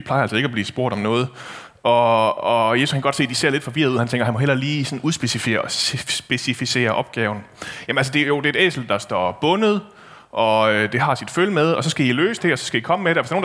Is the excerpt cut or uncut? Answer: uncut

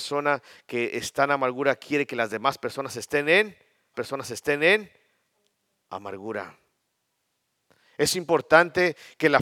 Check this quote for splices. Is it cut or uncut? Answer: cut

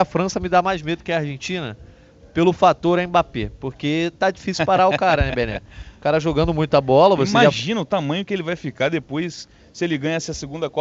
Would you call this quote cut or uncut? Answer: uncut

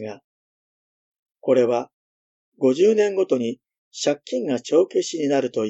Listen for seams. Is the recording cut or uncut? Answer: uncut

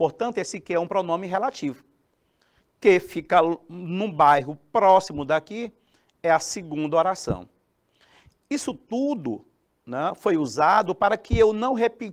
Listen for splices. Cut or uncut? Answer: uncut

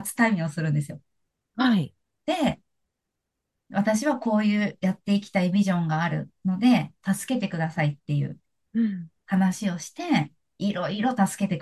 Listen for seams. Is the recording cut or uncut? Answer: uncut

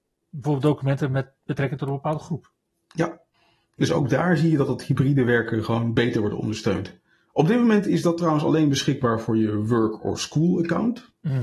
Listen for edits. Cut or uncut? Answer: uncut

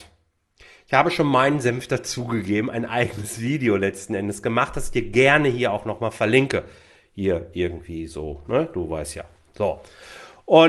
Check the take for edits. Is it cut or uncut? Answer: uncut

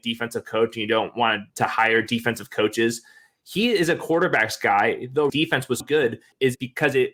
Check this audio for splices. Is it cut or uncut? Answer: cut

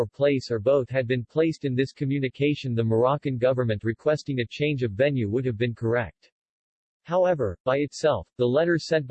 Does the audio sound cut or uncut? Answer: uncut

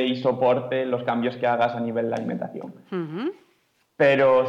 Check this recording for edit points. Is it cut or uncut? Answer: uncut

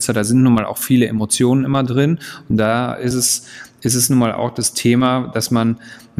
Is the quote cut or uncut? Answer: uncut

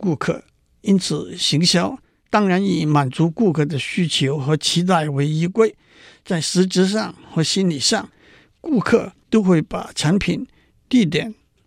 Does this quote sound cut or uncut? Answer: uncut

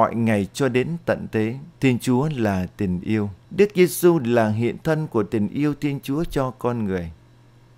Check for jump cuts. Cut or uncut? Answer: cut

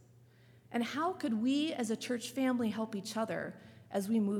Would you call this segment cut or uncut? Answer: uncut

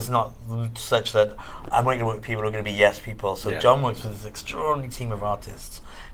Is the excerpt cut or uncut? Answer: uncut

